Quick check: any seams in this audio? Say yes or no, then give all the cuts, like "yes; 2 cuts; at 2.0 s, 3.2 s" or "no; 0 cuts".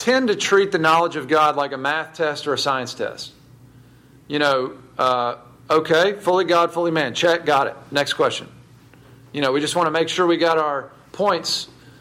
no; 0 cuts